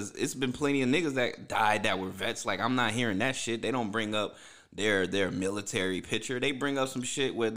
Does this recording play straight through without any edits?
yes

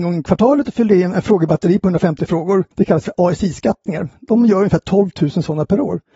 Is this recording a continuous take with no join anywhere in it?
no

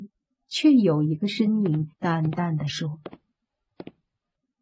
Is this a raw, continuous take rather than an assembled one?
no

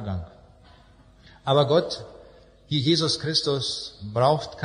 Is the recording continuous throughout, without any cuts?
yes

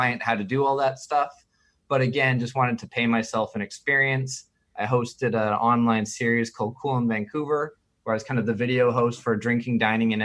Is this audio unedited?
yes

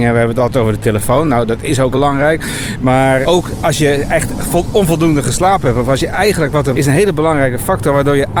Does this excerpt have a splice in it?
yes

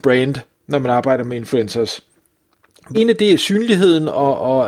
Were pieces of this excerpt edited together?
yes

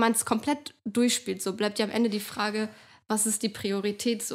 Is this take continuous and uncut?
yes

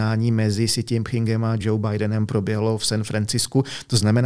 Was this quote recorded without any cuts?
yes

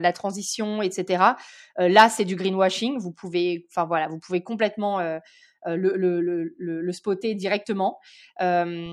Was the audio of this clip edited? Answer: no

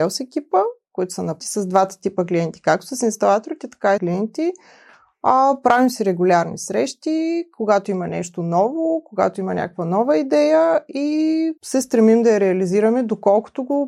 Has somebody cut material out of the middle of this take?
yes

